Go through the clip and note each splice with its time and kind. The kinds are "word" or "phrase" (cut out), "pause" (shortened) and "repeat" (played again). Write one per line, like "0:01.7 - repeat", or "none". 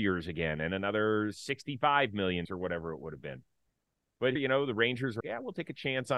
0:02.5 - word
0:04.4 - word
0:05.2 - word

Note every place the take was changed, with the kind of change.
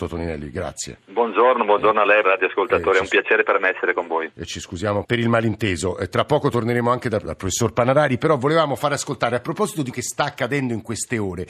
0:02.2 - word
0:05.0 - word
0:07.3 - word
0:09.9 - word

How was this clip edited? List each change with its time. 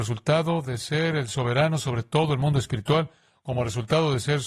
none

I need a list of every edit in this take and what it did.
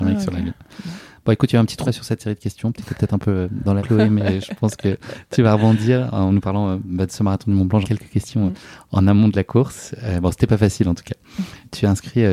0:01.9 - word
0:03.8 - word
0:07.8 - word

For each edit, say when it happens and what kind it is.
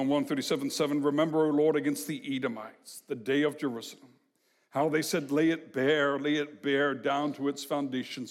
none

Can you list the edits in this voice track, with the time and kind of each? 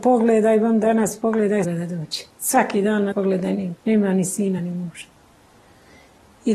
0:01.6 - phrase
0:02.3 - pause
0:03.1 - word
0:03.8 - pause
0:04.6 - word

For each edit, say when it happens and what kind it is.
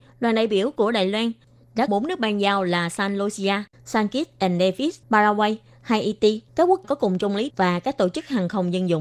0:01.9 - word
0:03.7 - pause
0:05.0 - pause
0:06.5 - pause
0:06.8 - word
0:07.5 - word

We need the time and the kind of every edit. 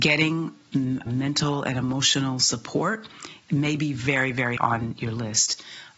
0:01.1 - word
0:04.6 - word

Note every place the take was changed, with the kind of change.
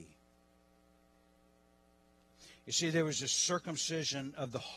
none

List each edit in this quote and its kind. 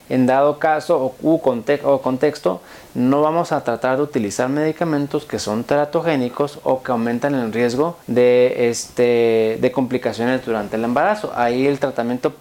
0:08.0 - pause

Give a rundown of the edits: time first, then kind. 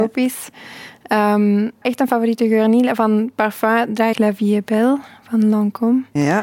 0:01.8 - word
0:04.1 - phrase

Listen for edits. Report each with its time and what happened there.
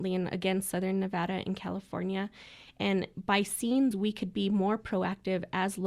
0:03.9 - word

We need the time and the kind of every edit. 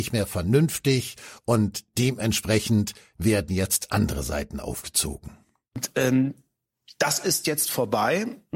none

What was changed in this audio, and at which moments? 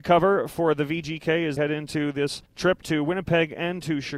0:01.6 - word
0:02.5 - pause

